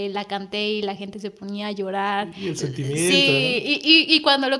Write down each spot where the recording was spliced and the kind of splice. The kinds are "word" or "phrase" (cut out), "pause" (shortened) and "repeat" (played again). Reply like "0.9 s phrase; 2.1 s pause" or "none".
none